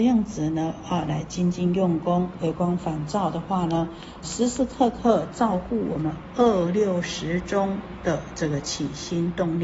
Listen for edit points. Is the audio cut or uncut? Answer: cut